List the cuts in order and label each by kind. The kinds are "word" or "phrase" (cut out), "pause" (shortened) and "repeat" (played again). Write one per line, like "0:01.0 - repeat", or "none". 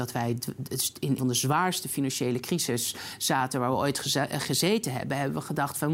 0:01.2 - word